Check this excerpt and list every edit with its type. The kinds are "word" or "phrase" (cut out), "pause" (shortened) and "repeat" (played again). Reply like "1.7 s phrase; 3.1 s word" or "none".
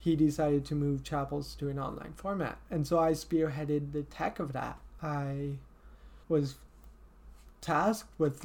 6.2 s pause